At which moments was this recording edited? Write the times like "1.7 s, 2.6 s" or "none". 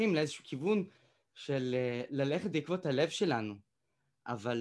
none